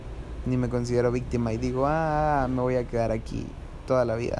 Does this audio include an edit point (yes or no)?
no